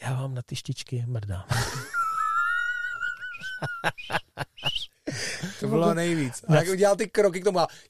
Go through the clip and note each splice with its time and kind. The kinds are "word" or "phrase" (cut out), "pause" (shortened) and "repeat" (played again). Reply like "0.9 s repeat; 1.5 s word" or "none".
5.6 s word